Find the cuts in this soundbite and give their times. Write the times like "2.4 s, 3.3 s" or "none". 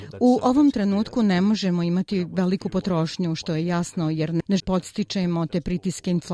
4.6 s